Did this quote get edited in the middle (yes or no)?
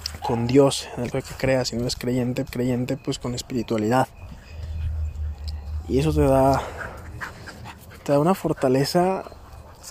yes